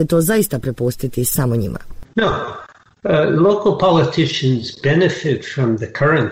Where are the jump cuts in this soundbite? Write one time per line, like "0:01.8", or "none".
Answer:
0:02.1